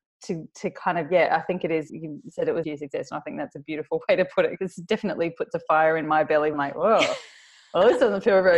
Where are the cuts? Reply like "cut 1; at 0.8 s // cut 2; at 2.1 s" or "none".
cut 1; at 1.9 s // cut 2; at 2.6 s // cut 3; at 6.5 s